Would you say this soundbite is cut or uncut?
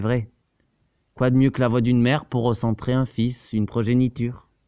uncut